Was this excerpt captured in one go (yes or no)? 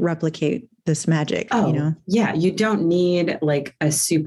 no